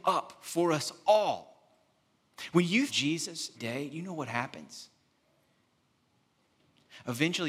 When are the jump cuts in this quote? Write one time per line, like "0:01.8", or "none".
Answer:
0:02.9
0:03.6